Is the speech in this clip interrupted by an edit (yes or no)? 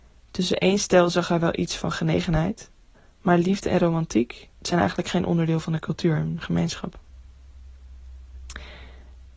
yes